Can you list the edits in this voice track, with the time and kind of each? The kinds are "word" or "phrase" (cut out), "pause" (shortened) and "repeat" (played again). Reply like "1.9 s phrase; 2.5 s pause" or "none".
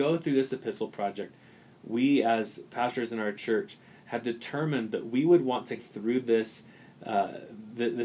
5.8 s word